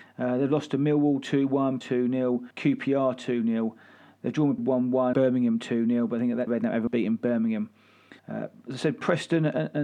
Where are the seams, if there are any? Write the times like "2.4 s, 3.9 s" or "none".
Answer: 1.8 s, 2.5 s, 4.6 s, 5.1 s, 6.5 s, 6.9 s, 8.2 s